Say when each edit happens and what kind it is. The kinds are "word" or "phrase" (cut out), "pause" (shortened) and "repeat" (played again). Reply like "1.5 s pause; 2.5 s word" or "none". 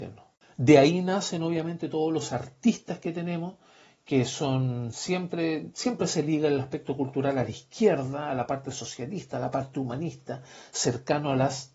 none